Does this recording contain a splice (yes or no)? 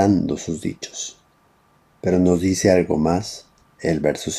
no